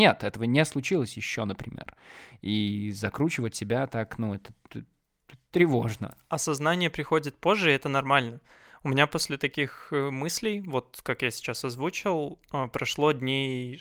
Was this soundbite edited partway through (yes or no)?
no